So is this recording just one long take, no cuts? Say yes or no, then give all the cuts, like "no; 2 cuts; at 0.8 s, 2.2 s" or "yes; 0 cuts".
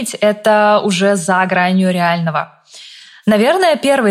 yes; 0 cuts